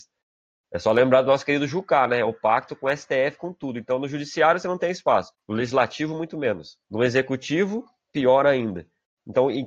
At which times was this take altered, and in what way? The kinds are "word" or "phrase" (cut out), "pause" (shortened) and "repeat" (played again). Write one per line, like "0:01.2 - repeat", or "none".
0:05.3 - pause
0:06.8 - pause